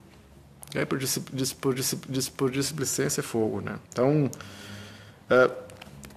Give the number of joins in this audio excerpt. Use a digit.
2